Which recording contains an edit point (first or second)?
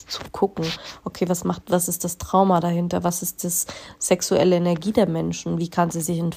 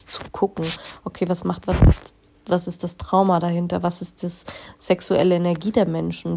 first